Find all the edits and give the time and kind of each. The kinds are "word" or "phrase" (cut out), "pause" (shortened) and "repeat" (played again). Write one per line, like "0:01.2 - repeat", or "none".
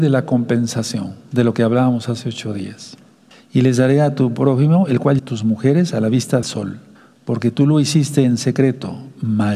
0:03.3 - pause
0:05.2 - phrase
0:06.4 - word
0:07.0 - pause